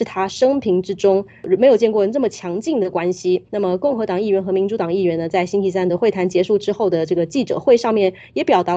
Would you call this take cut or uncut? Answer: cut